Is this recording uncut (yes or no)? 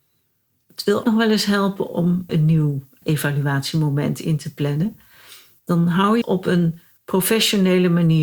no